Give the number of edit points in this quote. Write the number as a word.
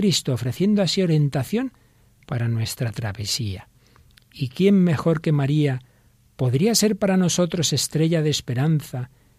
zero